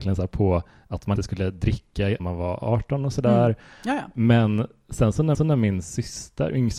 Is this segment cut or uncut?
cut